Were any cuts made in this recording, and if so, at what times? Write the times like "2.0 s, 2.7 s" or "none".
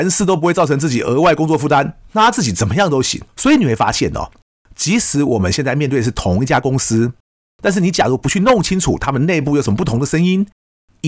2.1 s, 3.3 s